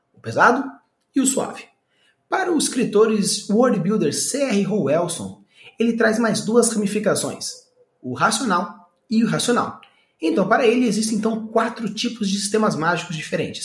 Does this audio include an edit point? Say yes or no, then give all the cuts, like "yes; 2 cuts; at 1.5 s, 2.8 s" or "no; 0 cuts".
no; 0 cuts